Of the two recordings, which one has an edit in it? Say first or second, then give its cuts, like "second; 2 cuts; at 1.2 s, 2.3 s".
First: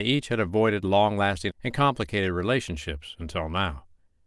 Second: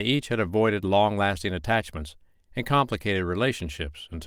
first; 1 cut; at 1.5 s